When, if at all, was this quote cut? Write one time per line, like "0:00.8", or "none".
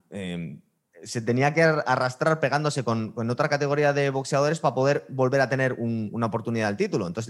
none